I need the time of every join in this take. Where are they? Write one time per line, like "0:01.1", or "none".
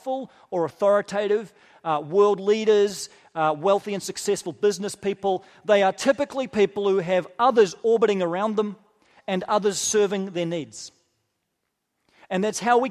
none